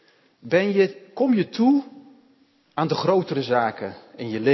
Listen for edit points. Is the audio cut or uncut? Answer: uncut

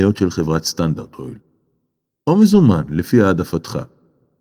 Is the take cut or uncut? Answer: uncut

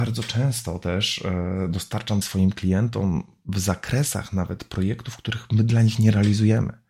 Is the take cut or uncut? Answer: cut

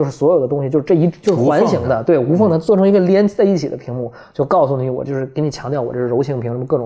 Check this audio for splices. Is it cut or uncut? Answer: uncut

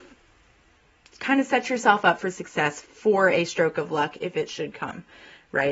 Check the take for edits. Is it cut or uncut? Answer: uncut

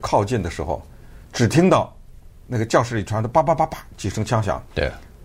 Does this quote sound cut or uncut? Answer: cut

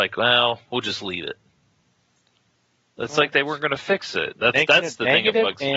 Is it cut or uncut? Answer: uncut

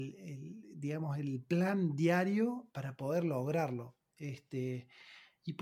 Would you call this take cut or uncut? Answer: cut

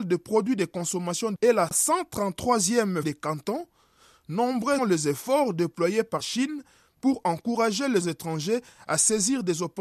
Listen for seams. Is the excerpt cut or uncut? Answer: cut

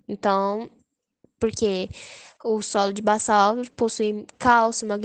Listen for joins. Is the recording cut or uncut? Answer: uncut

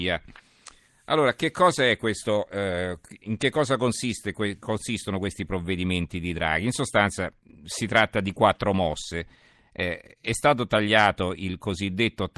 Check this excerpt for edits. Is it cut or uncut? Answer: uncut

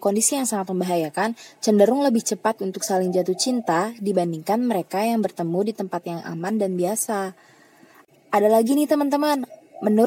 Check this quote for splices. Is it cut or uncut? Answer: uncut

